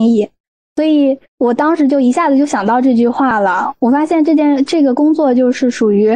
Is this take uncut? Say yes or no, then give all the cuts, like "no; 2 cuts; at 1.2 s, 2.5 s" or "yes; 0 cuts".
no; 1 cut; at 1.3 s